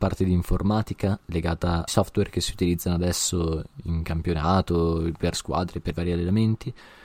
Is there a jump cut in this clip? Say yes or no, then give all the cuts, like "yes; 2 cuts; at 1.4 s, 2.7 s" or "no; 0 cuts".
yes; 3 cuts; at 1.9 s, 5.3 s, 5.9 s